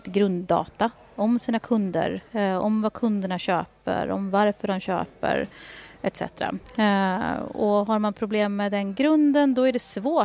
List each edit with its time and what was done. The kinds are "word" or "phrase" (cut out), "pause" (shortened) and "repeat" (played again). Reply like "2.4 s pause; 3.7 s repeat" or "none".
none